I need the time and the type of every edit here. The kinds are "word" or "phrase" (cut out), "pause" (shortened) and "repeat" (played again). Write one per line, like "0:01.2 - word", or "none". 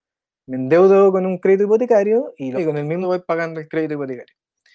0:02.6 - word
0:03.0 - word